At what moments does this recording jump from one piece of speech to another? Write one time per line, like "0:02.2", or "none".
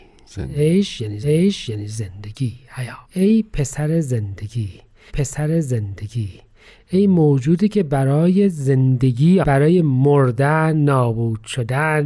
0:01.2
0:03.0
0:05.1
0:09.4